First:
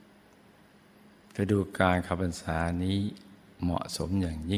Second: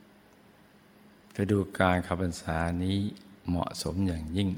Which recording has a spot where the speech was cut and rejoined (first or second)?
second